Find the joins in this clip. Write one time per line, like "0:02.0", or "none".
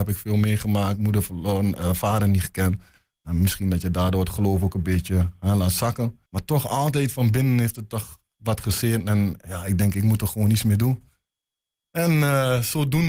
0:06.3